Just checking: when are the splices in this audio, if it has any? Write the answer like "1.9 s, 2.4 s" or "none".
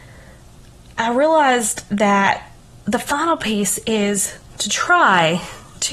none